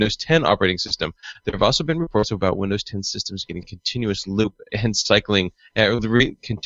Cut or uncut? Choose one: cut